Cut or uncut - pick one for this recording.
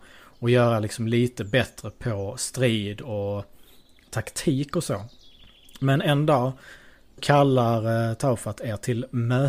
cut